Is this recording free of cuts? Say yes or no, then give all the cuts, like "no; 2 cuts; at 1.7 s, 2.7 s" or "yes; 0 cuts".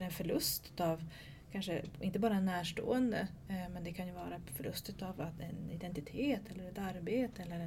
yes; 0 cuts